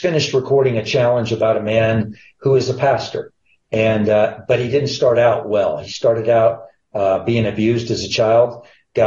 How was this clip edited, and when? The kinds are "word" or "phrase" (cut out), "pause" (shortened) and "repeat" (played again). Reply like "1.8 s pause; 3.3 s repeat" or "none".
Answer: none